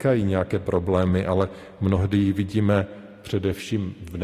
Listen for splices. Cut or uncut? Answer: uncut